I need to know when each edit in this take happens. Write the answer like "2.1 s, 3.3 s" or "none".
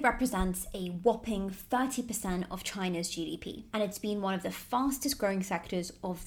none